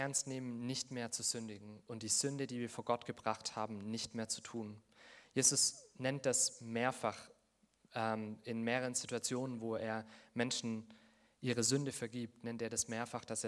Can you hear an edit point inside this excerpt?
no; 0 cuts

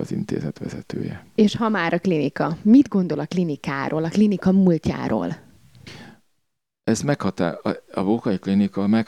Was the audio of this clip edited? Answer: no; 0 cuts

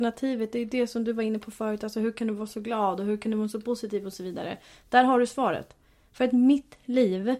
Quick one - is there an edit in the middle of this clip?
no; 0 cuts

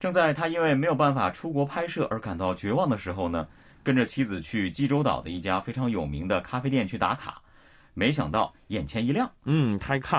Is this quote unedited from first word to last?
yes; 0 cuts

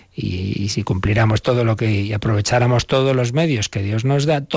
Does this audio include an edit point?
no; 0 cuts

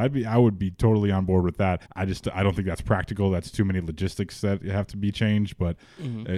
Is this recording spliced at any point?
yes; 1 cut; at 1.9 s

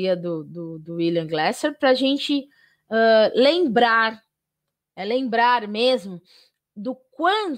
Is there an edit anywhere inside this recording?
no; 0 cuts

